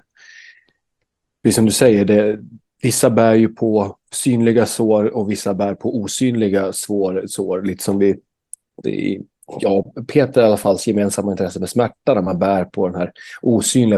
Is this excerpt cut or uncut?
cut